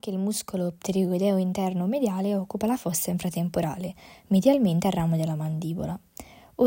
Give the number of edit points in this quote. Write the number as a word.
zero